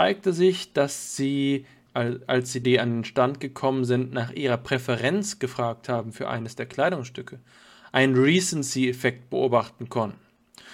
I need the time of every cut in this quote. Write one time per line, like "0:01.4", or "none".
0:01.9
0:02.6